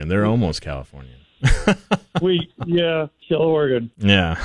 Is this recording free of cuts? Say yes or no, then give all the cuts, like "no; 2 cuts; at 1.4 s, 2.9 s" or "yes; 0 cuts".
no; 1 cut; at 3.2 s